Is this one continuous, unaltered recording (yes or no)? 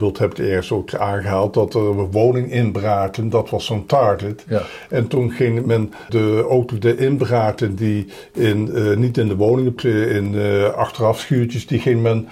no